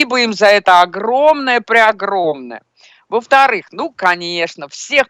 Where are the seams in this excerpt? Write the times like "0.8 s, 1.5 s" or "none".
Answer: none